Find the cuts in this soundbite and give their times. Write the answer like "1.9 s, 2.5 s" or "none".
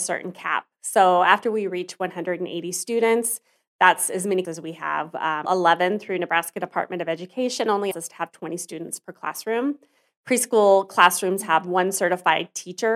4.4 s, 5.4 s, 7.9 s